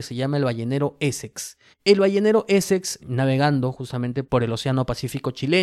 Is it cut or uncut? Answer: cut